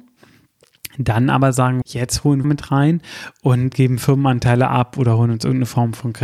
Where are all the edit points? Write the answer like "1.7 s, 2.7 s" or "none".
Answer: 1.8 s, 2.4 s, 3.7 s

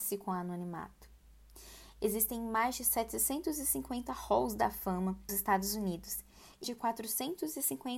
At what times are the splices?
5.3 s, 6.6 s

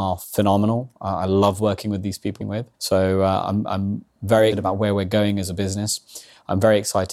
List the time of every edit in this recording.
2.4 s, 2.7 s, 3.4 s, 4.5 s

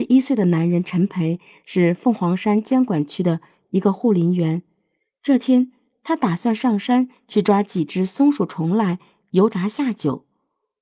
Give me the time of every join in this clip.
none

